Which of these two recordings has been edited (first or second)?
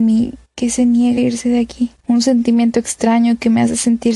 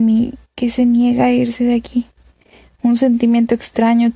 first